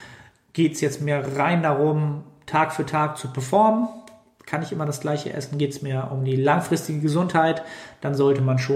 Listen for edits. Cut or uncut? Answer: uncut